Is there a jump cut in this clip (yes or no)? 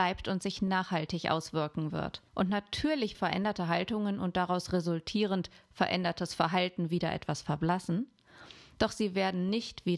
yes